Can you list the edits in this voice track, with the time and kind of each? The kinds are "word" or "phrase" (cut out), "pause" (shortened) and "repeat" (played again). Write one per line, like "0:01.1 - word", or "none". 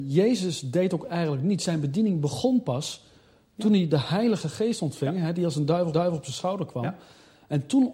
0:05.9 - repeat